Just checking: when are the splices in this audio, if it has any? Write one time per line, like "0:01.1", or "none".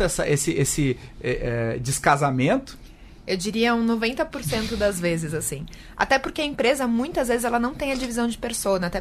none